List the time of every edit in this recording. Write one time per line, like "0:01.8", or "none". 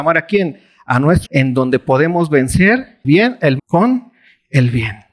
0:01.3
0:03.0
0:03.6